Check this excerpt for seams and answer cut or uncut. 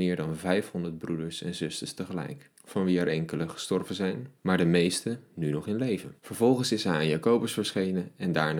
cut